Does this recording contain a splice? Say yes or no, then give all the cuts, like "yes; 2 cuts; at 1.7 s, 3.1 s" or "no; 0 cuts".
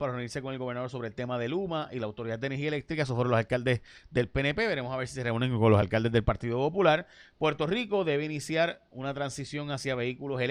no; 0 cuts